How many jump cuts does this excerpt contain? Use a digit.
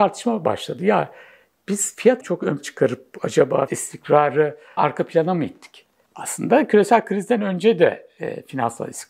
4